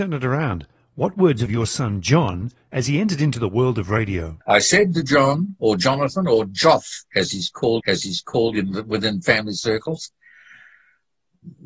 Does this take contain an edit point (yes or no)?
yes